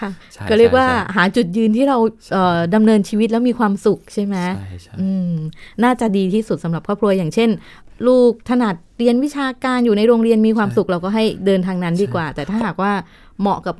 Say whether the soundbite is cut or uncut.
cut